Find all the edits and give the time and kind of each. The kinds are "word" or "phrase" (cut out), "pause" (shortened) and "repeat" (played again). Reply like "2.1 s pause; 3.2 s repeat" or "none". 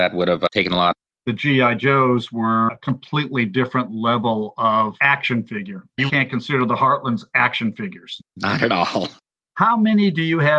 1.1 s pause; 6.1 s word; 8.3 s pause; 9.3 s pause